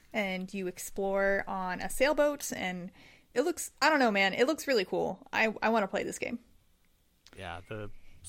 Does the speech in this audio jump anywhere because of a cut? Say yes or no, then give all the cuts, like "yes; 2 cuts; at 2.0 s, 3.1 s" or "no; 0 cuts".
no; 0 cuts